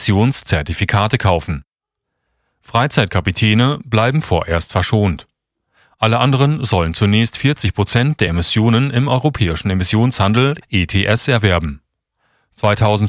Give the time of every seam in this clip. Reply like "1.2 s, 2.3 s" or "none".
none